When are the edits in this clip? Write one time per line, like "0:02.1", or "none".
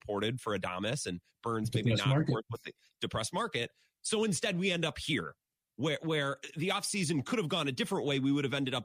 none